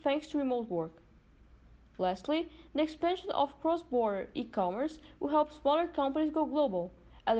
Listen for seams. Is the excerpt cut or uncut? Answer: uncut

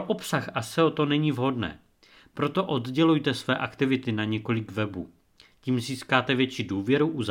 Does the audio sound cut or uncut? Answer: uncut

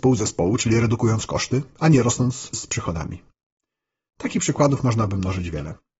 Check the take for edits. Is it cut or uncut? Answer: uncut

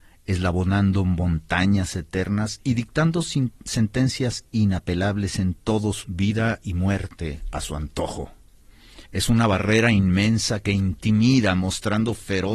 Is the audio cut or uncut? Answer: cut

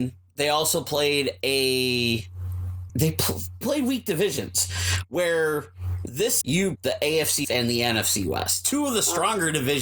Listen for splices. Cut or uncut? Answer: cut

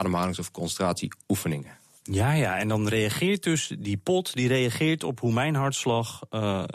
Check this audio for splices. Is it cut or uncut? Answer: uncut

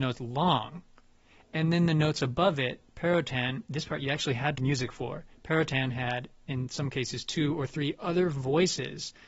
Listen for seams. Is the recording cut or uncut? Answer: cut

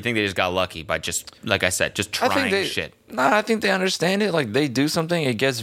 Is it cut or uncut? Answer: cut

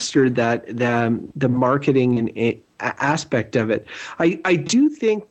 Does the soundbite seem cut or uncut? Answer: uncut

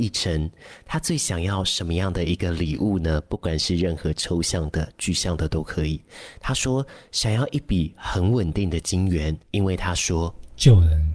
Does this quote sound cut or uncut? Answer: cut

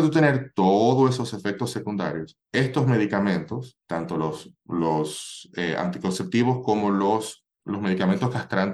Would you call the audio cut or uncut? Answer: cut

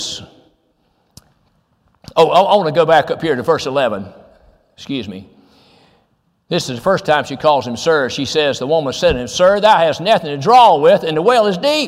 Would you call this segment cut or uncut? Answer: uncut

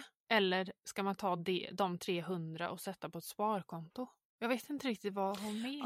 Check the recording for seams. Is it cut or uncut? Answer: uncut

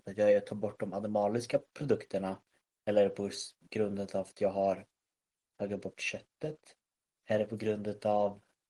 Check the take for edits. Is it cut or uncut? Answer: uncut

